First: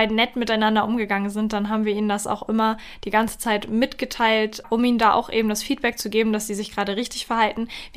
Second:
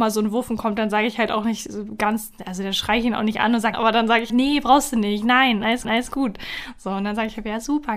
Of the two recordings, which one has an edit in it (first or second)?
second